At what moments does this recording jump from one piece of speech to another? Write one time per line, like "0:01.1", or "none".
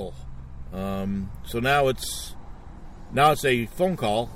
none